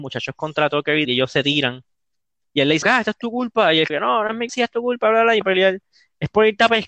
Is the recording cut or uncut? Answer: cut